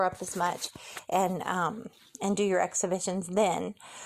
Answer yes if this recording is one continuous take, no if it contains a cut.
yes